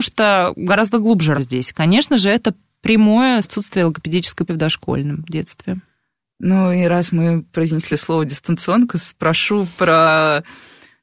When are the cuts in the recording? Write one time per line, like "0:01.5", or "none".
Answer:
0:01.3
0:03.4
0:04.5
0:07.9